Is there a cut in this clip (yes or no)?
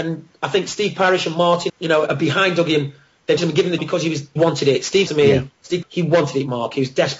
yes